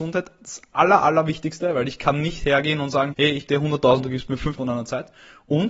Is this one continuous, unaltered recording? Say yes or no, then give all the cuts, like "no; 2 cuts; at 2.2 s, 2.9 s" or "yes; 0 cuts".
no; 4 cuts; at 3.1 s, 3.5 s, 4.0 s, 4.6 s